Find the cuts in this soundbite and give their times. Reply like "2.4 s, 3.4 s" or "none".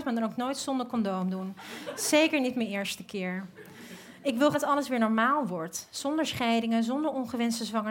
4.5 s